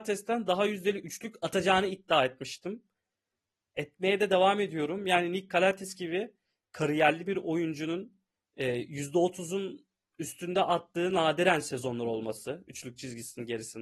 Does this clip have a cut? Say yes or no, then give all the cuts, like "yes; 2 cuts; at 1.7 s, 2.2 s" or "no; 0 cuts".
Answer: no; 0 cuts